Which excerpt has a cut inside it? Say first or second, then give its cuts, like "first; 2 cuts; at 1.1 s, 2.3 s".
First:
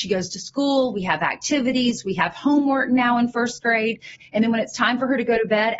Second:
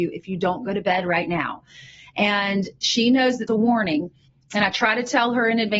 second; 1 cut; at 3.5 s